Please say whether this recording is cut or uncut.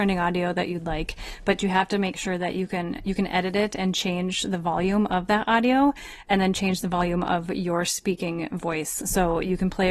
uncut